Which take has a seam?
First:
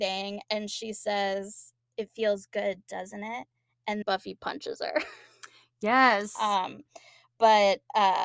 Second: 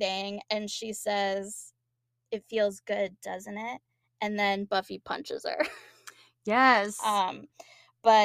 first; 2 cuts; at 1.8 s, 4.0 s

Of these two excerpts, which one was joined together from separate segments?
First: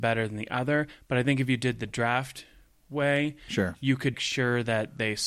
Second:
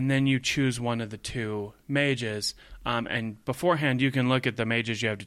first; 1 cut; at 4.1 s

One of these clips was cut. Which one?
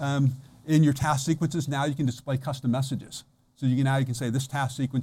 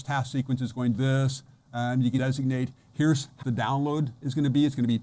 second; 3 cuts; at 0.9 s, 2.2 s, 3.4 s

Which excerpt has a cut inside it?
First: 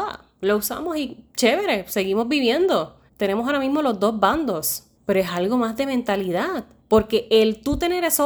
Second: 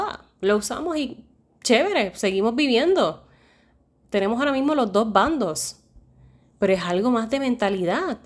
first; 4 cuts; at 1.3 s, 3.1 s, 4.9 s, 6.8 s

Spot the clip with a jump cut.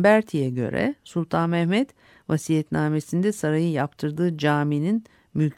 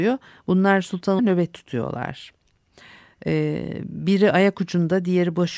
second; 1 cut; at 1.2 s

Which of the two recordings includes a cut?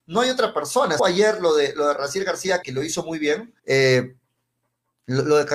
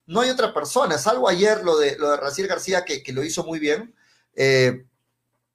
first; 3 cuts; at 1.0 s, 2.6 s, 3.6 s

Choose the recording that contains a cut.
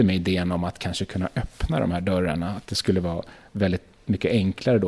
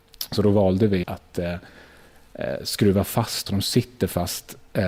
second; 2 cuts; at 1.0 s, 3.5 s

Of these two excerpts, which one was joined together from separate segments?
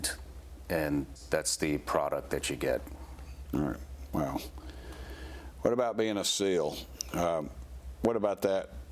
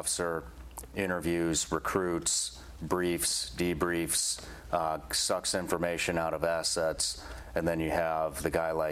first; 1 cut; at 1.2 s

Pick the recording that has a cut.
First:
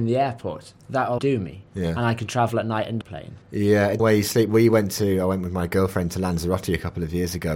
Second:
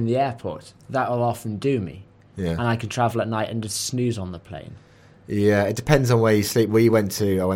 first; 5 cuts; at 1.2 s, 1.7 s, 3.0 s, 3.4 s, 4.0 s

